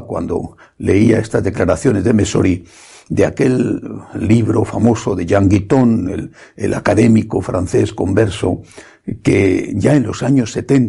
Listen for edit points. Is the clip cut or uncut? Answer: uncut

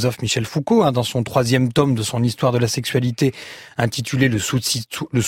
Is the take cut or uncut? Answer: uncut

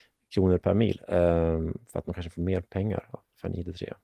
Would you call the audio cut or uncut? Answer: uncut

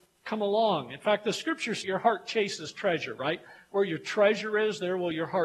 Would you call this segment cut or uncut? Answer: cut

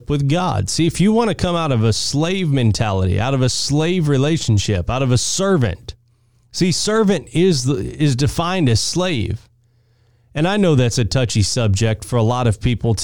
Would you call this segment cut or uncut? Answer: uncut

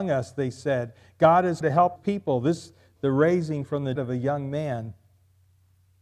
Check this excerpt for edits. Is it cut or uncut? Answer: cut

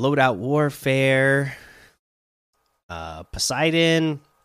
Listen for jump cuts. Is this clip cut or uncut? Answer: uncut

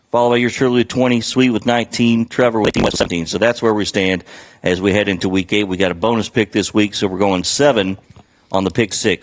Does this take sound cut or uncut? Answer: uncut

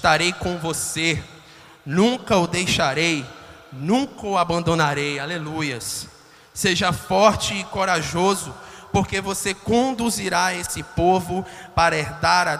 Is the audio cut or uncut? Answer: uncut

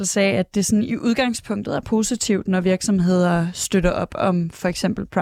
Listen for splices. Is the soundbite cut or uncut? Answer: uncut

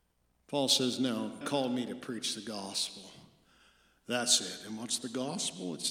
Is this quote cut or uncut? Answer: cut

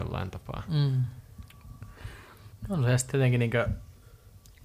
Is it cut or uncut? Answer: cut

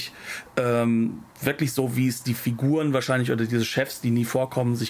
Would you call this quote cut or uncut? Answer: uncut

